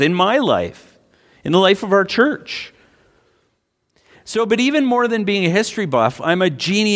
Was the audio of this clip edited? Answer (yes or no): no